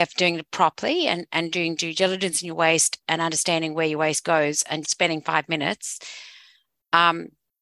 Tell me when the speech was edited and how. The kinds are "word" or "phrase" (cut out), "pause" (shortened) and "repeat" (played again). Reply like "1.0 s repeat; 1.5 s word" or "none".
4.8 s word